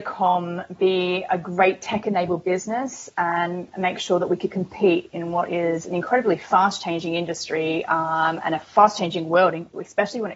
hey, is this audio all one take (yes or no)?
yes